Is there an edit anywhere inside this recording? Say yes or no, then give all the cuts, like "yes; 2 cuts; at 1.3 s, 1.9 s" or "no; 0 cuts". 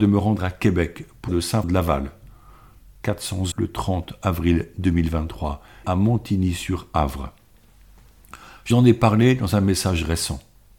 yes; 5 cuts; at 1.3 s, 1.6 s, 3.5 s, 5.8 s, 8.7 s